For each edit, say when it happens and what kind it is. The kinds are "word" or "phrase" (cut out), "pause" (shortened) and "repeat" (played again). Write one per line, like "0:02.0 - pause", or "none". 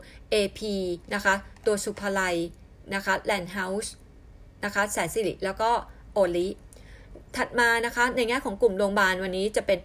0:01.0 - pause